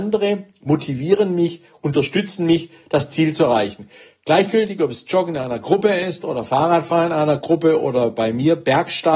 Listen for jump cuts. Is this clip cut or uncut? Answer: uncut